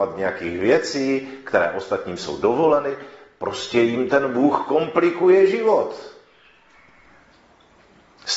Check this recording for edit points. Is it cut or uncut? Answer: uncut